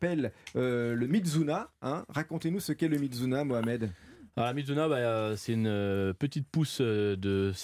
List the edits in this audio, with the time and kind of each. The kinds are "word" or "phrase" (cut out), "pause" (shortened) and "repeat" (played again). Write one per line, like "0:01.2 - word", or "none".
none